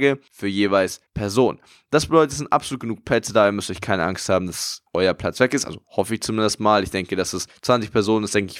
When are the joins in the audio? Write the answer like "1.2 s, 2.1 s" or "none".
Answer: 1.1 s, 5.9 s